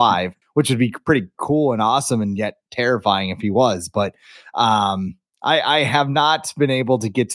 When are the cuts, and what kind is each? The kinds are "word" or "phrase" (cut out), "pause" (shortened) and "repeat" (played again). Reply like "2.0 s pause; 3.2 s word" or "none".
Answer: none